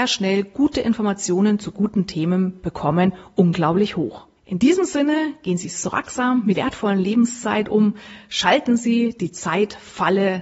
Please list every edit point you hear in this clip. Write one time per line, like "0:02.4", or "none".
0:04.4
0:06.5